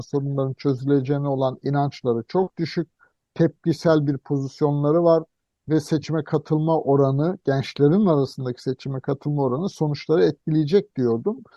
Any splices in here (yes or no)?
no